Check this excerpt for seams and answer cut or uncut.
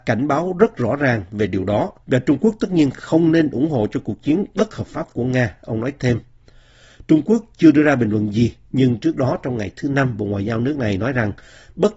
cut